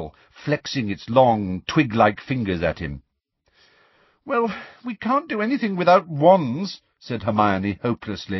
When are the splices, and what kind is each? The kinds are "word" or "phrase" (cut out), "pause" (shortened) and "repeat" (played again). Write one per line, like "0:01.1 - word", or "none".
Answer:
none

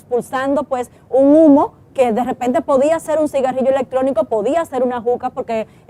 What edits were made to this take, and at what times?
none

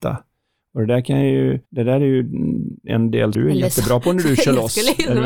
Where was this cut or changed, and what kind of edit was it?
0:01.6 - pause
0:03.3 - word

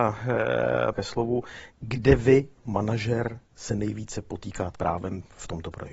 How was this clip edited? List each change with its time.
0:00.9 - word
0:01.7 - pause
0:02.6 - word
0:03.5 - pause
0:04.7 - word

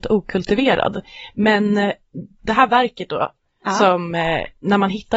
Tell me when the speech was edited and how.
none

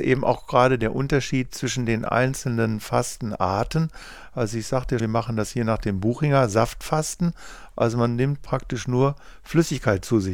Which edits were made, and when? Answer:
0:05.0 - word

